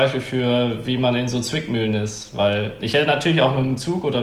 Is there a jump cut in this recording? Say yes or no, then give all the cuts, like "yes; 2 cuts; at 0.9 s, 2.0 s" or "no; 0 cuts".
no; 0 cuts